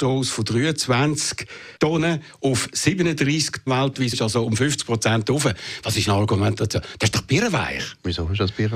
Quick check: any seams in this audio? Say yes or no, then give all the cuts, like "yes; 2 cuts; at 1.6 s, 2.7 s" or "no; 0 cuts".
yes; 4 cuts; at 1.8 s, 3.7 s, 4.1 s, 6.1 s